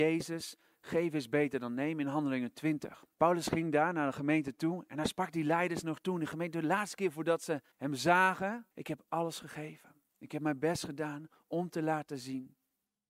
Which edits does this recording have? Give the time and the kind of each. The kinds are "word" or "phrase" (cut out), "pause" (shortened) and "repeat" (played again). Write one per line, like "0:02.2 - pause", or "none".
0:03.1 - pause
0:07.7 - pause
0:08.7 - pause